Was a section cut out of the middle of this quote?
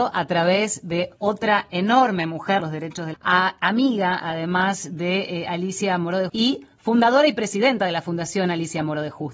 yes; 4 cuts; at 1.2 s, 2.6 s, 3.1 s, 6.3 s

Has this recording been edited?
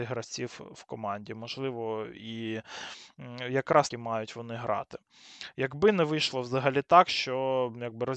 yes; 1 cut; at 3.9 s

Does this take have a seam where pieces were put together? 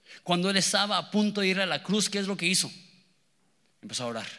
no; 0 cuts

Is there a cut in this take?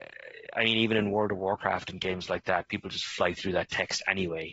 no; 0 cuts

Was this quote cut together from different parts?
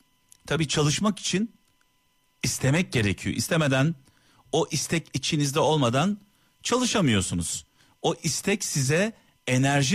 no; 0 cuts

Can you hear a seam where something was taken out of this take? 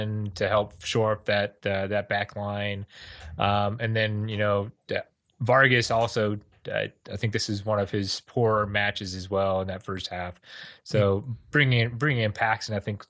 no; 0 cuts

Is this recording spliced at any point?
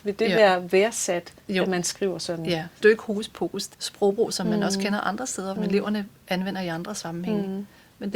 yes; 4 cuts; at 1.4 s, 2.8 s, 3.7 s, 5.6 s

